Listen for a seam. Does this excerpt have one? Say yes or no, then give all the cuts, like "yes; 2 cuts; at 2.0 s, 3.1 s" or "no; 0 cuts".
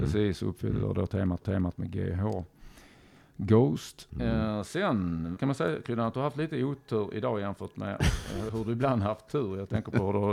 yes; 4 cuts; at 1.4 s, 4.1 s, 5.4 s, 8.5 s